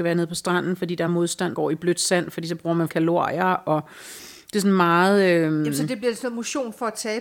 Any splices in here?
yes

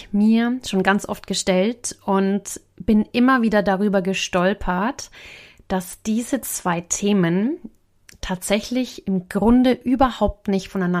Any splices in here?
no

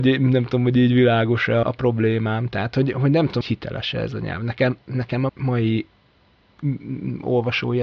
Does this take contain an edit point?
yes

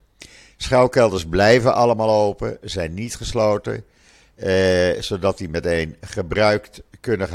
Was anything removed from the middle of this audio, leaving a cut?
no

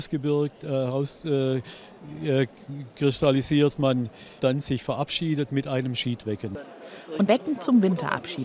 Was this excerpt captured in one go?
no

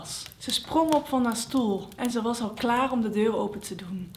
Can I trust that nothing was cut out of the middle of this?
yes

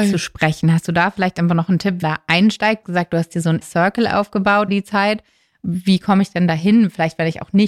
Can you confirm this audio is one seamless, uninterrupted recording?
no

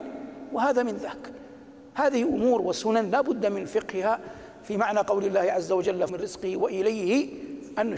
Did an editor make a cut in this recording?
yes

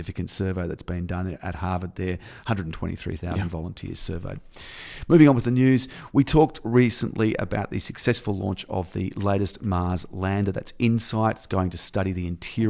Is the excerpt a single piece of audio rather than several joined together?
yes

